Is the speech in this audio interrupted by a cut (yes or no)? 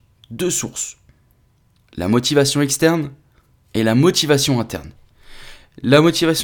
no